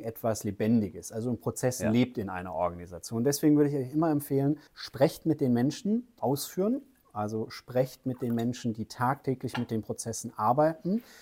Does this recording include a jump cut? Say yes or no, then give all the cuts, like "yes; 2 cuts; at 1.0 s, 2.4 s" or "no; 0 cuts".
yes; 2 cuts; at 4.7 s, 6.2 s